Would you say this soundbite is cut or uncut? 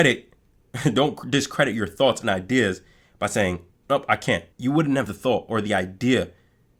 cut